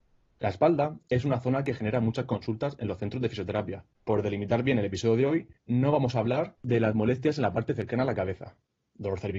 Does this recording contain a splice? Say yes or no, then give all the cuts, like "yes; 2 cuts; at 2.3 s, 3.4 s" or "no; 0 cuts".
yes; 3 cuts; at 3.9 s, 5.6 s, 6.6 s